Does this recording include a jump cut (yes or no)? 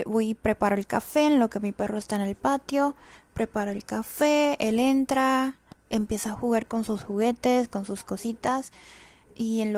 no